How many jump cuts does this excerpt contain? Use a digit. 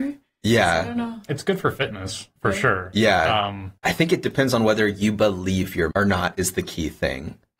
3